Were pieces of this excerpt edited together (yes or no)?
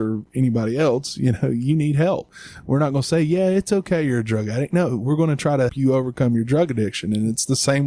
yes